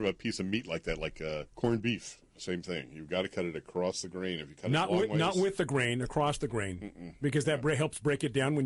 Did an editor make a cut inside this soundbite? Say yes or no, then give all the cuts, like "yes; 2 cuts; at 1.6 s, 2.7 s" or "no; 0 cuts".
yes; 1 cut; at 1.5 s